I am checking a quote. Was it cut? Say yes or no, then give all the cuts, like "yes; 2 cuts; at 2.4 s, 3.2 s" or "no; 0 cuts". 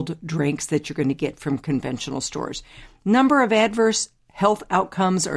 no; 0 cuts